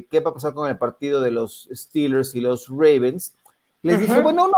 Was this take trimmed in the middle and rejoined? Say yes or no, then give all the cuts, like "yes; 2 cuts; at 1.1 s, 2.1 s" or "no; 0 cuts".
no; 0 cuts